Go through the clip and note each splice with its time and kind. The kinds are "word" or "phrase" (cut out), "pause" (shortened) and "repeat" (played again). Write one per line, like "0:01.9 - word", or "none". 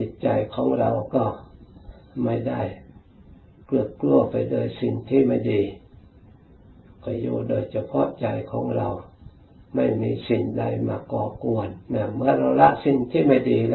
0:11.8 - pause